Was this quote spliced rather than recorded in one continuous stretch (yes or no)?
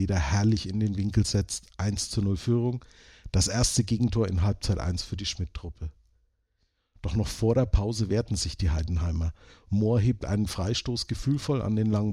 no